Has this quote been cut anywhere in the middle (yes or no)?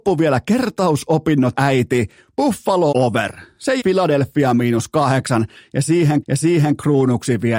yes